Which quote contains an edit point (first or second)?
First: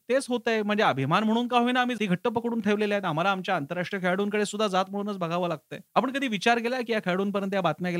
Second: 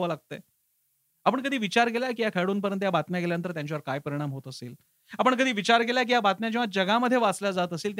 first